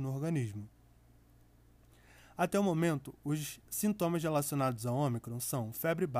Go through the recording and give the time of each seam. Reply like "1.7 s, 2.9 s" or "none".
3.6 s